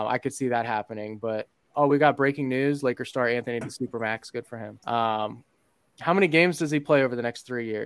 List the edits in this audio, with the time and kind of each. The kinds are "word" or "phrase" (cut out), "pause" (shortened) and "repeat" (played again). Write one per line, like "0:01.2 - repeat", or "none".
0:01.7 - word
0:03.6 - phrase
0:04.8 - pause

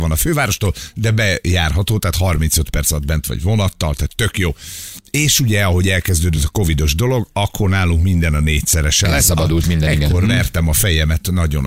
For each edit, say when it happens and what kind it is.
none

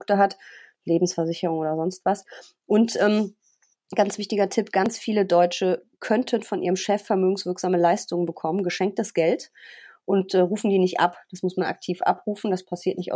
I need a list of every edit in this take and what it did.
none

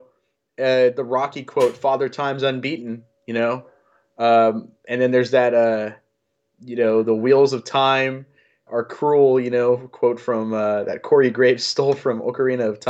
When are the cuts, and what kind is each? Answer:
0:08.7 - word

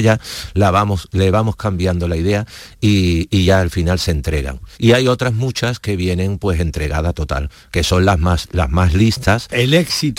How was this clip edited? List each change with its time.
0:04.7 - pause

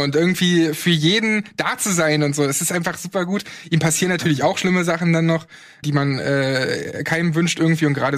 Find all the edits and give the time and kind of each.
0:05.8 - word

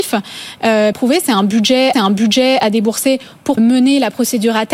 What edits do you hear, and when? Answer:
0:00.9 - phrase
0:01.9 - repeat
0:03.6 - word

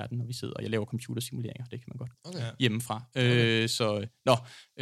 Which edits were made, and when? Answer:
0:02.1 - word

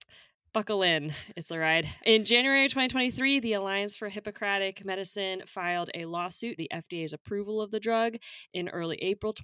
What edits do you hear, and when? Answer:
0:06.6 - word

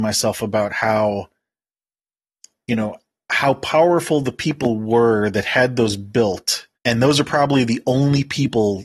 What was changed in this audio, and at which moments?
0:06.7 - pause

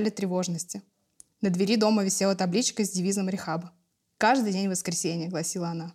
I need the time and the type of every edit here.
none

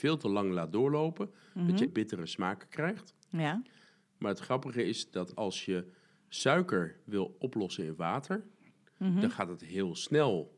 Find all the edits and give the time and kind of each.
0:01.9 - word

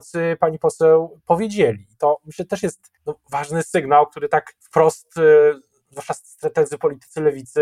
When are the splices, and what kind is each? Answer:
0:03.0 - pause
0:04.6 - pause

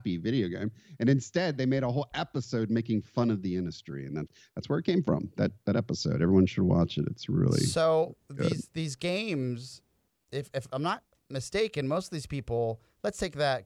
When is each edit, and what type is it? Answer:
none

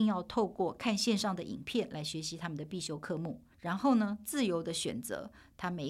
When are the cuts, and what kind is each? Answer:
0:03.5 - pause

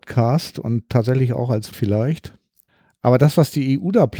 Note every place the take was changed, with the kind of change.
0:01.7 - word
0:02.7 - pause

